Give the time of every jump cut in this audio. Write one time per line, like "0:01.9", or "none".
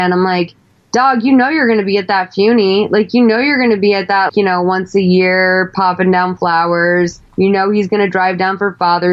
0:04.3
0:07.3